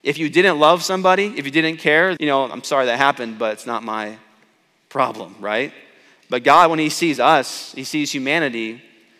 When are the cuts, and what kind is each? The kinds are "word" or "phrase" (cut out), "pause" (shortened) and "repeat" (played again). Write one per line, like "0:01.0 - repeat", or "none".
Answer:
0:02.2 - word